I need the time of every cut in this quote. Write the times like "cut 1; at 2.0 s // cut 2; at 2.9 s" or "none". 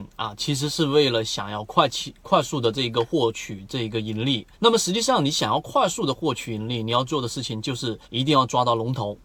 cut 1; at 4.5 s // cut 2; at 8.0 s